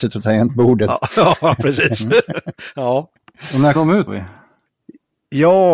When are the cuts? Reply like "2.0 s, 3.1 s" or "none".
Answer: 1.6 s, 3.7 s, 4.1 s